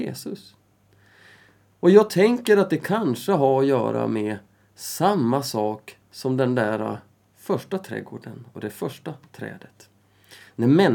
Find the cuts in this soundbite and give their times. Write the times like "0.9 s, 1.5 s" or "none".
none